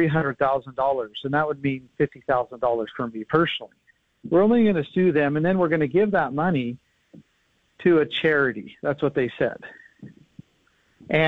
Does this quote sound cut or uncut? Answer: uncut